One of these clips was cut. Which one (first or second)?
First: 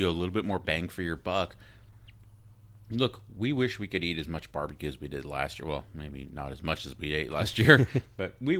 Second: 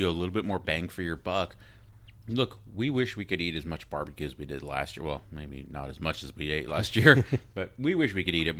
second